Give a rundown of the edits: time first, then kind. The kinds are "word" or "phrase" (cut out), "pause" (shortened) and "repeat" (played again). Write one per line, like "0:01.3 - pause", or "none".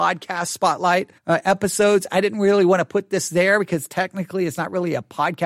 0:01.2 - pause